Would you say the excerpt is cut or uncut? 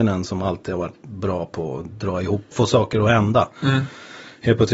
cut